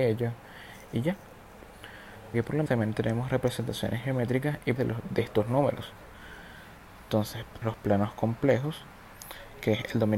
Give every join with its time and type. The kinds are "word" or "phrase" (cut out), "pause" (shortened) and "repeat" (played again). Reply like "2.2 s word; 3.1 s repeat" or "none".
2.3 s word; 2.7 s word; 4.8 s word; 7.6 s word